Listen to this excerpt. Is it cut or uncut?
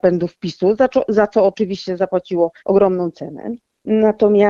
cut